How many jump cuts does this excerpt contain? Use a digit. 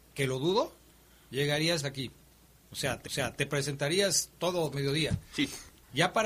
4